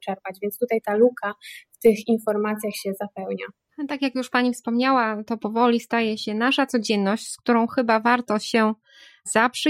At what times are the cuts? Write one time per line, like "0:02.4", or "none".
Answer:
0:05.3